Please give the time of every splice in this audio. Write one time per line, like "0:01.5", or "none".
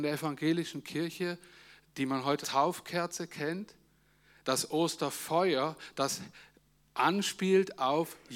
0:02.4